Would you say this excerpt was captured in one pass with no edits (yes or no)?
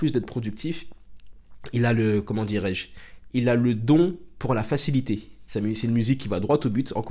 yes